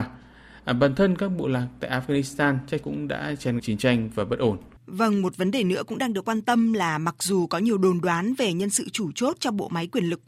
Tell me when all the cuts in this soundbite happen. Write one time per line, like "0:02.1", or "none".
0:02.8
0:03.6
0:04.8